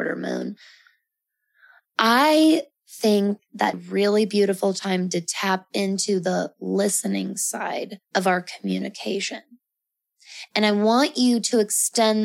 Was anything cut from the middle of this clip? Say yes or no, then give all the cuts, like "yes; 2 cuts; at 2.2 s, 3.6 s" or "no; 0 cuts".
yes; 2 cuts; at 3.7 s, 8.0 s